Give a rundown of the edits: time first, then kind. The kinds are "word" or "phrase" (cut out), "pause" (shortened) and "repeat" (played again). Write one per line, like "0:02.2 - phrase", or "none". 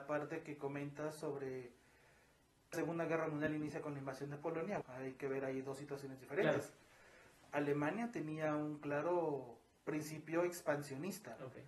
0:02.7 - word
0:04.8 - word